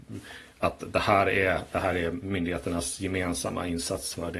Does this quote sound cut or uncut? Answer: uncut